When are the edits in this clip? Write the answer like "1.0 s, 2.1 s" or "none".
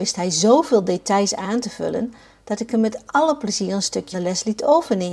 4.1 s